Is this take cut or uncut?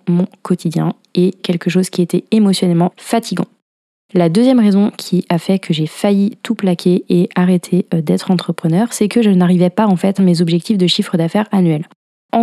cut